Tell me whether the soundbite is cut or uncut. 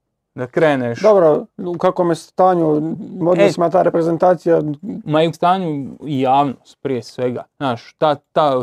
cut